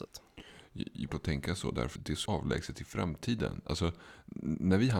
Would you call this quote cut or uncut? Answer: cut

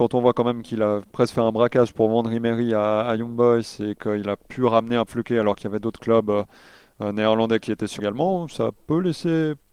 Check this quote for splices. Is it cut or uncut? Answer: cut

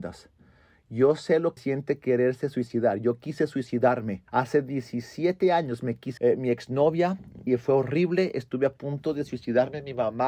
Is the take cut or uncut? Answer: cut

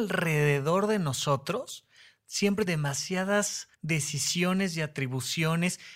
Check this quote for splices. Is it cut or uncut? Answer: cut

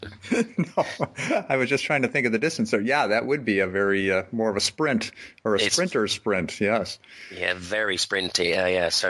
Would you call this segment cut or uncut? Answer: uncut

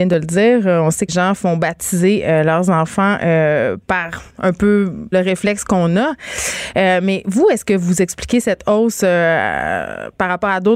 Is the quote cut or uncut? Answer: cut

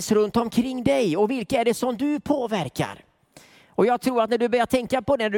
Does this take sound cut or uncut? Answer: uncut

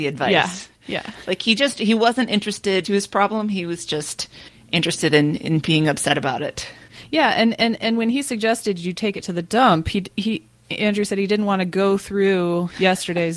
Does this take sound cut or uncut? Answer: cut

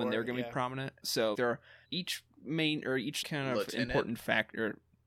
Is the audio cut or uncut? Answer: cut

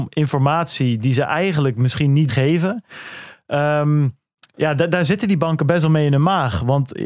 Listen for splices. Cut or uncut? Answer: cut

